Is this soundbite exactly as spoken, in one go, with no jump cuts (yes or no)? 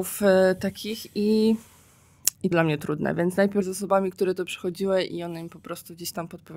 no